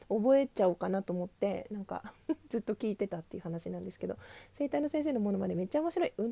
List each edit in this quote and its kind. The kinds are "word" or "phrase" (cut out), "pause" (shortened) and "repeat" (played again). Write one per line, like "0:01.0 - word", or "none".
0:02.2 - pause